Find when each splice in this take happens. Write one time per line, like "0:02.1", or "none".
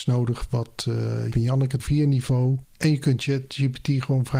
0:01.3
0:01.8